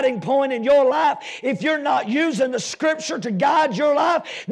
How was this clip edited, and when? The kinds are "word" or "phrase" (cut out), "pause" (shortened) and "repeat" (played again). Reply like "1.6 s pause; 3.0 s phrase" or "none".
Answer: none